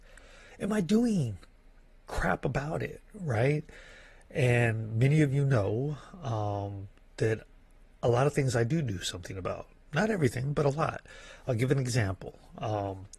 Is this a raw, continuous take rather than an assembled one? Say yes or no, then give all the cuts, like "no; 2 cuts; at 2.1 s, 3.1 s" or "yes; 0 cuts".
yes; 0 cuts